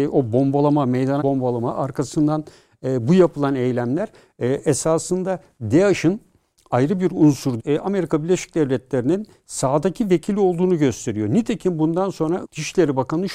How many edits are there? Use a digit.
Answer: 3